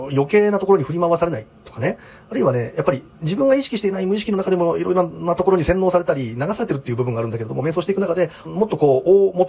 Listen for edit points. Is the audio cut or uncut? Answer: uncut